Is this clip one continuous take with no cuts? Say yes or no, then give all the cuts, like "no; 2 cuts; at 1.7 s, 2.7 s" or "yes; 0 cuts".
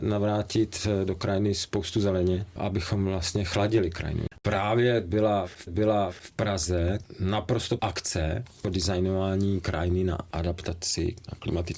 no; 2 cuts; at 5.7 s, 7.8 s